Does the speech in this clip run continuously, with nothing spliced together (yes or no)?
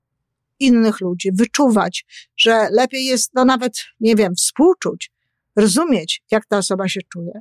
yes